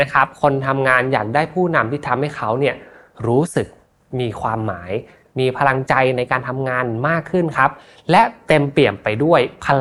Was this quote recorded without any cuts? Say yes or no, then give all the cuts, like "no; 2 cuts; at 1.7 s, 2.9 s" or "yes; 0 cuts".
yes; 0 cuts